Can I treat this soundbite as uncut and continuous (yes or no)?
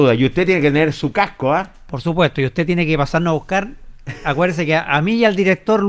yes